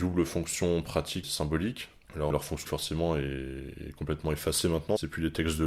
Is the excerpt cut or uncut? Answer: cut